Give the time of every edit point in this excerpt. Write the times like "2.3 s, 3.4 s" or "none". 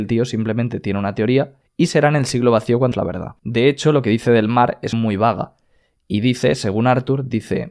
1.6 s, 2.9 s, 3.4 s, 4.9 s